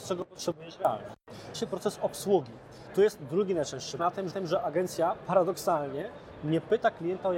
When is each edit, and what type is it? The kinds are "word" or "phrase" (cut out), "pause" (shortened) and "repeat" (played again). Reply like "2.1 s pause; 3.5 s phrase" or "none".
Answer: 1.5 s word; 4.0 s phrase; 4.3 s repeat